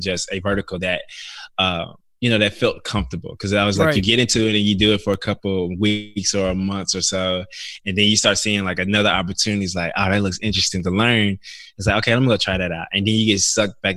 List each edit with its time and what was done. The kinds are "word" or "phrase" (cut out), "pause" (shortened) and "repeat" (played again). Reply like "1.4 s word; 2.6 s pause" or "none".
none